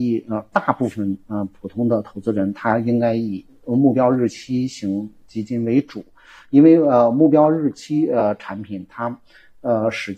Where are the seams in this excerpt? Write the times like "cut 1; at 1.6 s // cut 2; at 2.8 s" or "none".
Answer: none